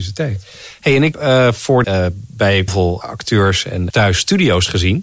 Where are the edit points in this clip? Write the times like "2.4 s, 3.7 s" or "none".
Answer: 1.1 s, 1.8 s, 2.7 s, 3.0 s, 3.9 s